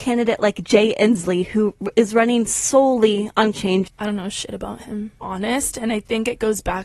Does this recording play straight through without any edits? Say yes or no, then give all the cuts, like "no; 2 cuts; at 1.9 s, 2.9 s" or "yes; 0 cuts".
no; 3 cuts; at 3.5 s, 3.9 s, 5.2 s